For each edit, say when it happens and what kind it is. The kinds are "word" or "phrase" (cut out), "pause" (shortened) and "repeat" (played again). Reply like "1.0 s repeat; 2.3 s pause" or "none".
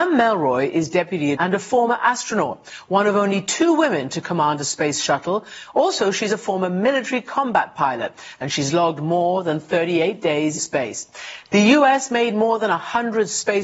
1.4 s phrase; 10.6 s word